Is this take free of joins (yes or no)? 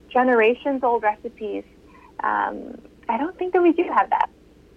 yes